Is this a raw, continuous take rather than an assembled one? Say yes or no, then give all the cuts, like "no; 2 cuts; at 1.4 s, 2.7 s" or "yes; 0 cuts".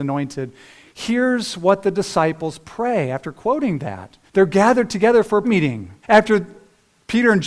no; 3 cuts; at 4.3 s, 5.4 s, 6.0 s